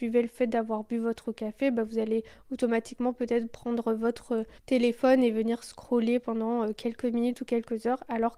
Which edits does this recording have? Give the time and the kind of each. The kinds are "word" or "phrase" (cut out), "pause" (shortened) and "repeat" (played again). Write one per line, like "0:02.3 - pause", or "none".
0:04.6 - pause